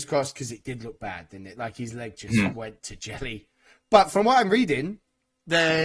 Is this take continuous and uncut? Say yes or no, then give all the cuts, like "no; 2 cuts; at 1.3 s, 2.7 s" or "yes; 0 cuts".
yes; 0 cuts